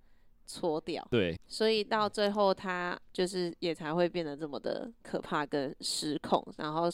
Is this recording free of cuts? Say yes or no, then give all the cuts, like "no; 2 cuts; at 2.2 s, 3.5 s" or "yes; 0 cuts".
no; 1 cut; at 1.4 s